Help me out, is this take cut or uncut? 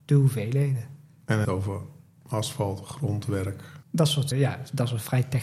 cut